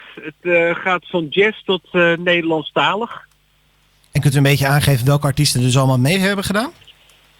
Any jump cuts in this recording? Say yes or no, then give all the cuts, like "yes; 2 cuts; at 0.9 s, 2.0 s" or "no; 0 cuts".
yes; 1 cut; at 3.7 s